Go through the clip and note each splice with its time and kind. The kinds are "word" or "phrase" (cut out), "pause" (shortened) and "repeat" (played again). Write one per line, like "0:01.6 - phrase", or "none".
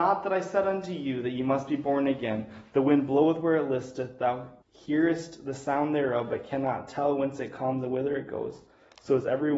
0:04.6 - pause